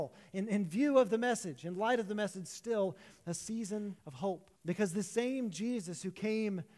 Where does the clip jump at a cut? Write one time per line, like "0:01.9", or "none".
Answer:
0:04.0
0:04.6